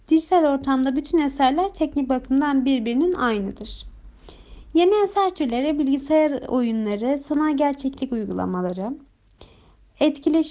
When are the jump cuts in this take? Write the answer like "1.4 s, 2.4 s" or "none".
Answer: none